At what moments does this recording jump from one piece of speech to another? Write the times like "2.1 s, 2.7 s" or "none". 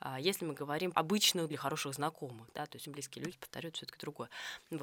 0.9 s, 1.5 s, 2.8 s, 3.3 s